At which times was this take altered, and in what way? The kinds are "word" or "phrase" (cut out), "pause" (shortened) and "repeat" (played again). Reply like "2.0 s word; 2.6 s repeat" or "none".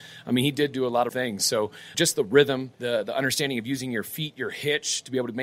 1.1 s phrase; 1.9 s word; 2.7 s pause